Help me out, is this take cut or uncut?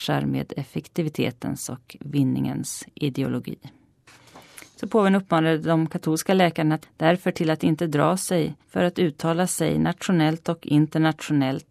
cut